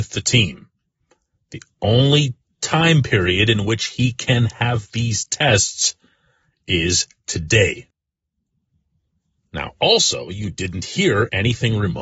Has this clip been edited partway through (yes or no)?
no